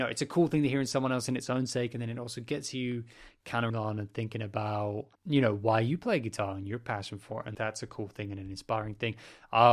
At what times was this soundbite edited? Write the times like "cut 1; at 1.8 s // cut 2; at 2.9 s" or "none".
cut 1; at 3.7 s // cut 2; at 5.2 s // cut 3; at 7.5 s